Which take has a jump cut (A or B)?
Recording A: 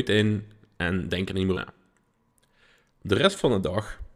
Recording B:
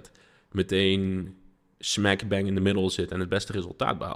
A